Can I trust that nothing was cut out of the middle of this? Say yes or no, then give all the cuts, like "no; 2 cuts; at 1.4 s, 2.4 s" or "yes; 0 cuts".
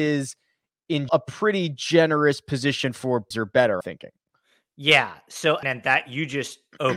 no; 4 cuts; at 1.1 s, 3.3 s, 3.8 s, 5.6 s